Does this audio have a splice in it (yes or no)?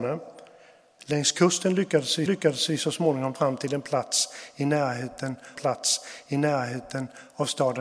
yes